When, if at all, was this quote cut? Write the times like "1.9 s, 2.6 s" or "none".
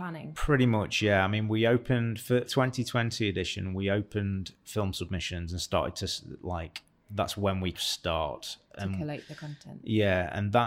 2.5 s, 7.7 s

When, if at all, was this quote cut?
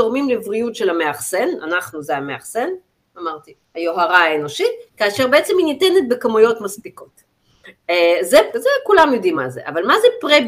3.6 s, 4.9 s, 8.5 s, 9.3 s

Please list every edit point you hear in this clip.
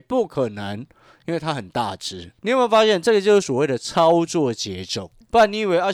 2.4 s

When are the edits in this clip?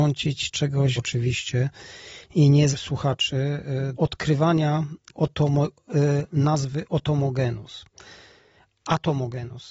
1.0 s, 2.7 s, 3.9 s, 5.1 s

